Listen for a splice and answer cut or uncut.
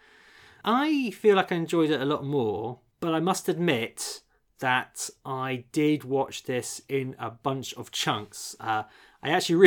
uncut